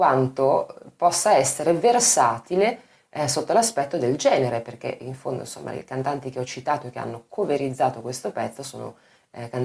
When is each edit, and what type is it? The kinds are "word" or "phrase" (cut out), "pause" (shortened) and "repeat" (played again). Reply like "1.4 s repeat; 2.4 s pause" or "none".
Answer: none